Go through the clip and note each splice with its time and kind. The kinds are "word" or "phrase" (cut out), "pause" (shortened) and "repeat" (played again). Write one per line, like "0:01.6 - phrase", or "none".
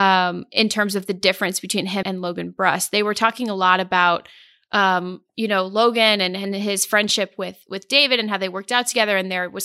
0:02.0 - word